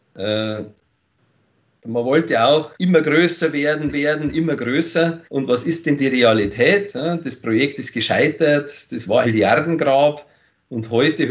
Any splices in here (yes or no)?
yes